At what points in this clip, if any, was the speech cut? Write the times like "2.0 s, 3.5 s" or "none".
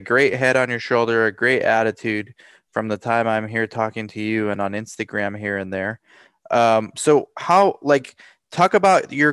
none